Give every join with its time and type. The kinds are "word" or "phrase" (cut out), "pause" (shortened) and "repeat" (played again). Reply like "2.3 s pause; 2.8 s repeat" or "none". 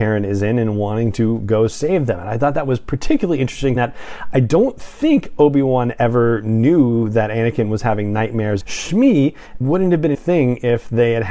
3.8 s word; 8.6 s word; 9.6 s word; 10.1 s word